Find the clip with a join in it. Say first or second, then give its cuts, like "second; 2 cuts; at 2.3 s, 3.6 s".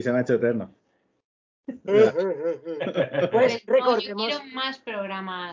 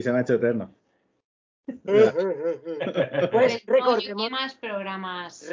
second; 1 cut; at 4.3 s